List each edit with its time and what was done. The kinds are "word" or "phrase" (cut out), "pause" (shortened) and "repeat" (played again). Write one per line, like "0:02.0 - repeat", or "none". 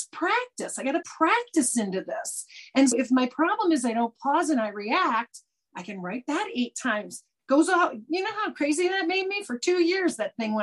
0:01.0 - word
0:02.9 - word